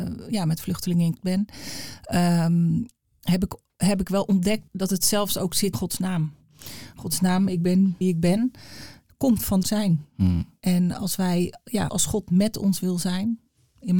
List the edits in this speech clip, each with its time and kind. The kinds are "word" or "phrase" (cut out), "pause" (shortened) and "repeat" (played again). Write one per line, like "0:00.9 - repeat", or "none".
0:01.2 - word
0:04.7 - word
0:05.7 - word
0:08.0 - word
0:09.6 - word
0:11.9 - word